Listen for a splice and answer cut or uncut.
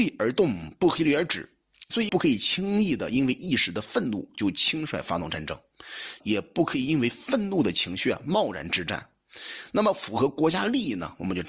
cut